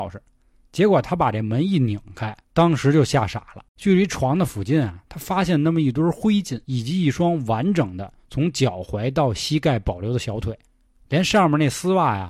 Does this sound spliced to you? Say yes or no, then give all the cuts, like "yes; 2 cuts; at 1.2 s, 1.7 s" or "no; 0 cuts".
yes; 3 cuts; at 2.4 s, 3.7 s, 6.6 s